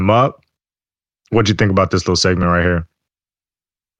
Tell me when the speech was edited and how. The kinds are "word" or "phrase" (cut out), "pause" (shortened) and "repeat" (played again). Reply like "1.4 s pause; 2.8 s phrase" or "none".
none